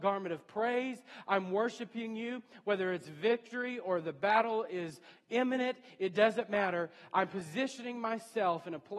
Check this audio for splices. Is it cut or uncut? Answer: uncut